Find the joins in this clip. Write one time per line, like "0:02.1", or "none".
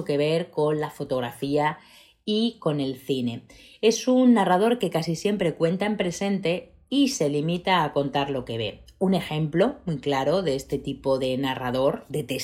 none